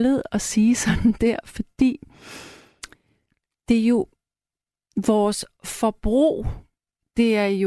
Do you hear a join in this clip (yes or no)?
no